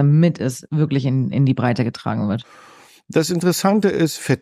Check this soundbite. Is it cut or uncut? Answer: uncut